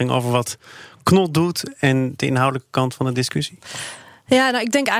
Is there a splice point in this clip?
no; 0 cuts

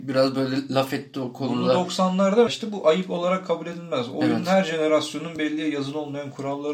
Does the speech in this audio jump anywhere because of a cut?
yes; 1 cut; at 2.5 s

